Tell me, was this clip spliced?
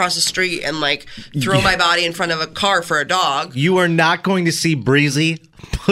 no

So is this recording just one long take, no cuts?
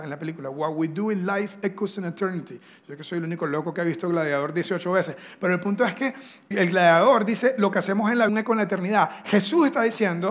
no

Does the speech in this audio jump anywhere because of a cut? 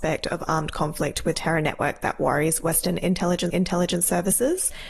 yes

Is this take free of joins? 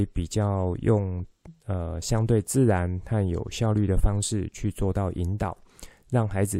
yes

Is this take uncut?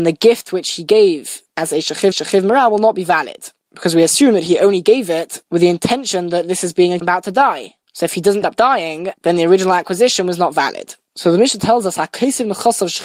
no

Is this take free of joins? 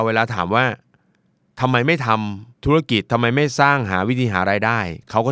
no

